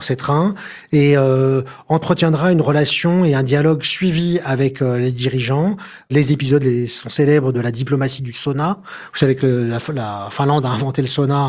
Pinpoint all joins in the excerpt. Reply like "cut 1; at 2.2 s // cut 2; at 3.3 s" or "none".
none